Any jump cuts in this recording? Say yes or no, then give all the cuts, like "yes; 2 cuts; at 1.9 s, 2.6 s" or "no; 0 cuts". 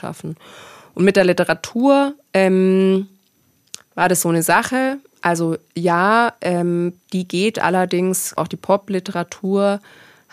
yes; 1 cut; at 8.4 s